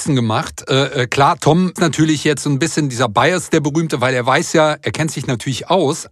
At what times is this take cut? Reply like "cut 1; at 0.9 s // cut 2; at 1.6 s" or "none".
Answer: cut 1; at 1.8 s